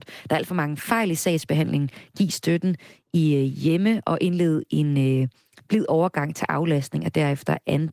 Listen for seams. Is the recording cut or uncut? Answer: uncut